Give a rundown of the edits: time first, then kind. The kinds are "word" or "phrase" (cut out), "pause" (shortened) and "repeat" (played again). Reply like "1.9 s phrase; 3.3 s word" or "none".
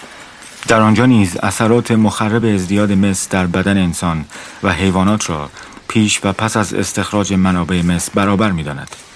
none